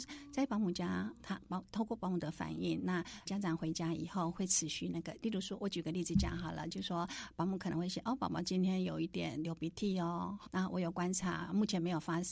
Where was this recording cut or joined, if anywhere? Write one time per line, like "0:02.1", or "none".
0:03.3
0:10.5